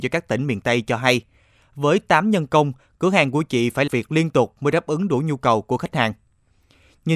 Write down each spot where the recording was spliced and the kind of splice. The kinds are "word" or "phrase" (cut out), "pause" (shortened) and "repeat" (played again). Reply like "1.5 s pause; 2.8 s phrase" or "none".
3.9 s word